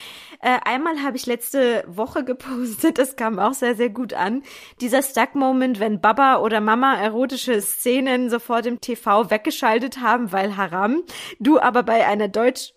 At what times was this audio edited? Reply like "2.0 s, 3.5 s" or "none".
8.8 s